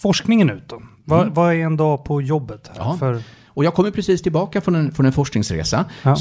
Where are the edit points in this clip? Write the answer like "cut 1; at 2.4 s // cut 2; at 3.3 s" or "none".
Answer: none